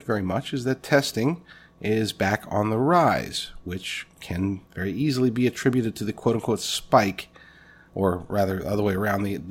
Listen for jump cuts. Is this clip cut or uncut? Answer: cut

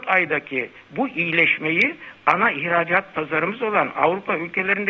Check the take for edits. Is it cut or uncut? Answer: uncut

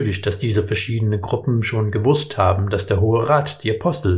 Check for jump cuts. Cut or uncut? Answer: uncut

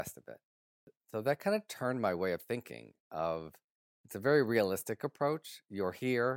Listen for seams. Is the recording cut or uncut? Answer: uncut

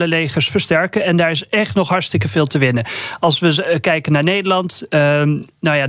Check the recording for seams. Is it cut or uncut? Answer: uncut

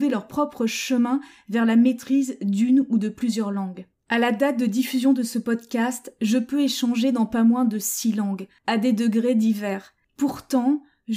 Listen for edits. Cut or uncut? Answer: uncut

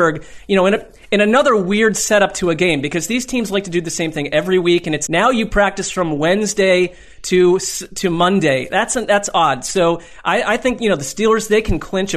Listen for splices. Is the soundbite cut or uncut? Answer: cut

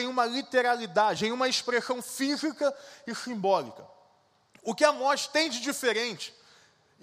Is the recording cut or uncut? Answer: uncut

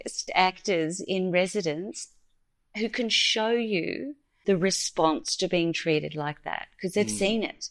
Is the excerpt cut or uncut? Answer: uncut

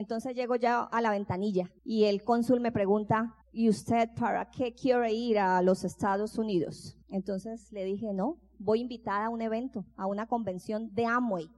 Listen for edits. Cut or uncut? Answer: cut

